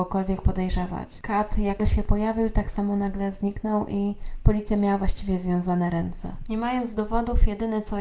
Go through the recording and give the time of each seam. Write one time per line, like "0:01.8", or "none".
0:01.8